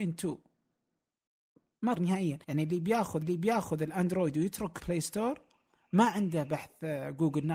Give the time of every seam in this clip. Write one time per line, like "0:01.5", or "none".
0:02.0
0:02.4
0:03.2
0:04.8